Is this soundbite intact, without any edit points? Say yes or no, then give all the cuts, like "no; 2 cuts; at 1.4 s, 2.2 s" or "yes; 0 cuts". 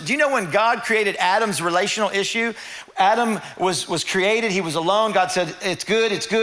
yes; 0 cuts